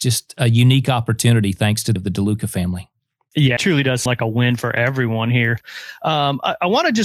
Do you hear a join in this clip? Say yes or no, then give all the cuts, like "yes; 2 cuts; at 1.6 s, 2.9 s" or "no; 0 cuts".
yes; 3 cuts; at 2.0 s, 3.6 s, 4.1 s